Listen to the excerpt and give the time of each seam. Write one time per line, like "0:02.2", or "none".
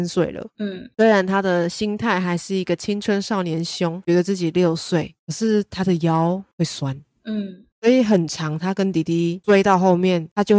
none